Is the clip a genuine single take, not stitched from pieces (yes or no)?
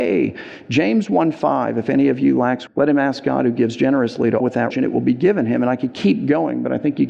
no